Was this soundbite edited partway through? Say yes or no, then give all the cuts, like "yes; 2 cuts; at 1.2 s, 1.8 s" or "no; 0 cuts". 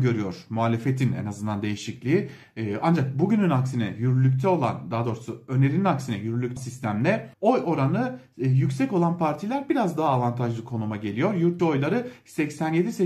yes; 3 cuts; at 6.6 s, 7.3 s, 11.6 s